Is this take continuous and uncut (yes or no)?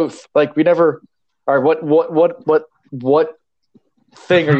yes